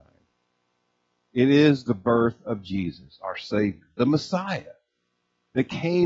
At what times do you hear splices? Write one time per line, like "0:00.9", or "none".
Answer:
none